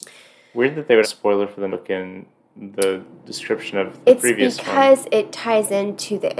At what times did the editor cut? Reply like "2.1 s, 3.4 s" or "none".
1.0 s, 1.7 s